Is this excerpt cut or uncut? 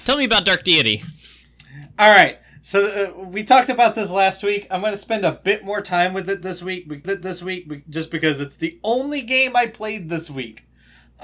cut